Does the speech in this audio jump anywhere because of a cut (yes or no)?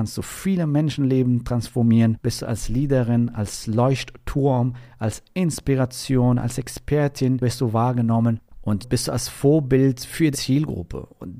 yes